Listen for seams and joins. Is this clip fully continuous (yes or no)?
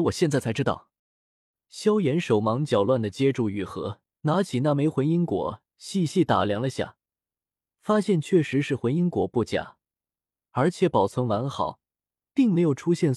no